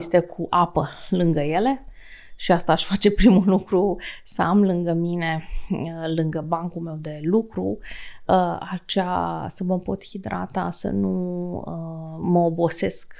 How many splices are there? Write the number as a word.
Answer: zero